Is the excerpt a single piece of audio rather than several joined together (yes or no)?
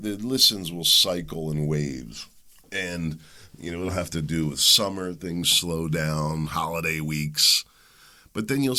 yes